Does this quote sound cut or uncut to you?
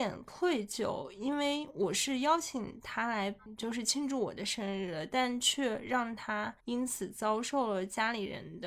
cut